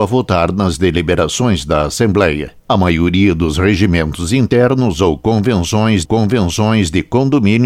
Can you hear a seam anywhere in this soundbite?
yes; 2 cuts; at 2.6 s, 6.0 s

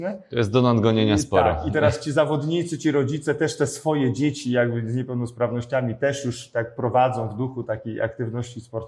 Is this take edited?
no; 0 cuts

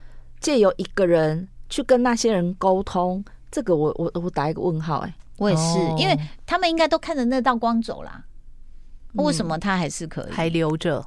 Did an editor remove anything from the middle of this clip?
no; 0 cuts

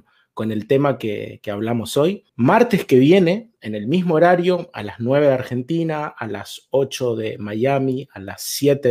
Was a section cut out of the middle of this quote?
yes; 1 cut; at 2.3 s

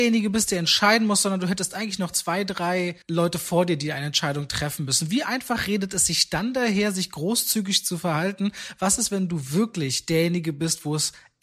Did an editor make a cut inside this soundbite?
yes; 1 cut; at 3.0 s

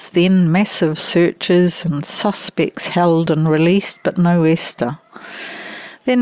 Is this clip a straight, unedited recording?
yes; 0 cuts

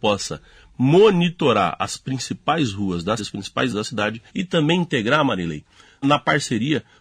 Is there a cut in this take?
yes; 4 cuts; at 3.2 s, 3.7 s, 4.3 s, 6.0 s

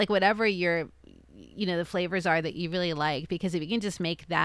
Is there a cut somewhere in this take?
no; 0 cuts

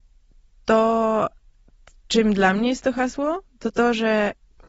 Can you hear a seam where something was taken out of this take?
no; 0 cuts

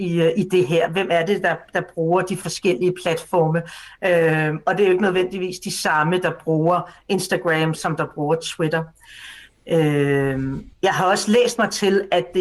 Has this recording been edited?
yes; 2 cuts; at 7.8 s, 10.7 s

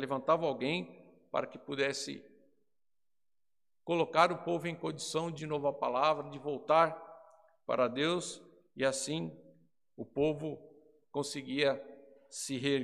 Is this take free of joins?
no; 1 cut; at 5.4 s

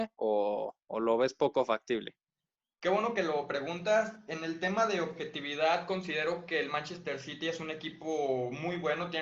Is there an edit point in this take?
no; 0 cuts

